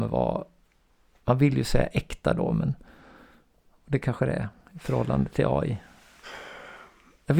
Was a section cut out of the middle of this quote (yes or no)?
no